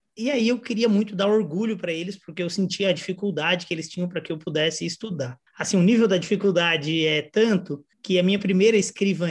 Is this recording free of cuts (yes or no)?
no